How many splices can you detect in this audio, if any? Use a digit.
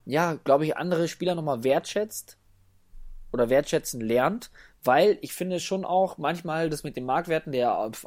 0